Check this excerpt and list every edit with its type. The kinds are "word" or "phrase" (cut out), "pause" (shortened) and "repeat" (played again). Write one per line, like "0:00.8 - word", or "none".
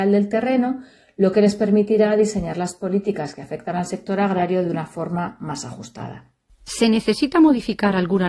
none